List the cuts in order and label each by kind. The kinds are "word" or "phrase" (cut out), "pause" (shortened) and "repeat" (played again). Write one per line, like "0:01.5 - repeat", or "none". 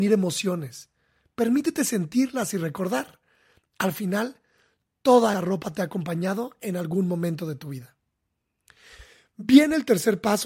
0:05.3 - word